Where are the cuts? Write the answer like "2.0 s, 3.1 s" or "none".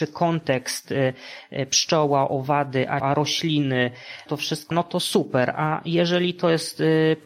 3.0 s, 4.3 s, 4.7 s